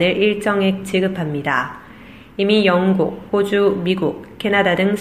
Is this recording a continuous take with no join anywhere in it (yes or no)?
no